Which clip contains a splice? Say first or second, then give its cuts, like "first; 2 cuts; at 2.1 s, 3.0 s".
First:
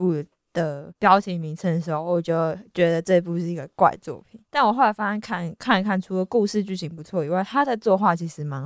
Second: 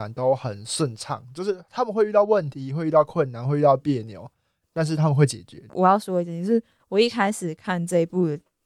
first; 2 cuts; at 0.9 s, 4.4 s